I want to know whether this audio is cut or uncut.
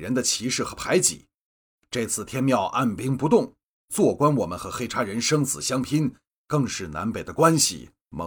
uncut